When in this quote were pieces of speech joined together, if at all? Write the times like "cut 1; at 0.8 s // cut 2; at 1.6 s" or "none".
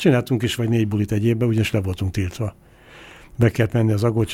none